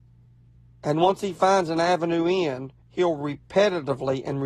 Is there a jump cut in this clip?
yes; 1 cut; at 2.8 s

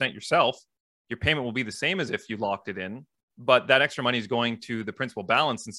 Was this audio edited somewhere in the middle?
no; 0 cuts

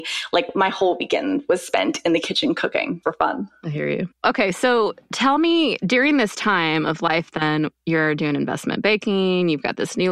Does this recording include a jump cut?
yes; 2 cuts; at 3.0 s, 4.1 s

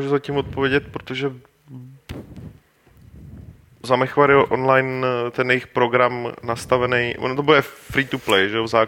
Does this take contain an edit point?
no; 0 cuts

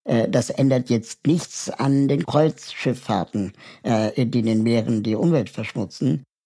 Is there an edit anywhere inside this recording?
no; 0 cuts

